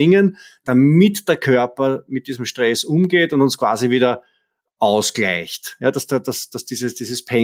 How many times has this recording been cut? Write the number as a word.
zero